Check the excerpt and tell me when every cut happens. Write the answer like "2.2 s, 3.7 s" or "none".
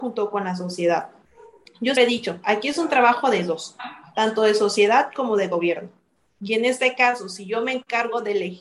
2.0 s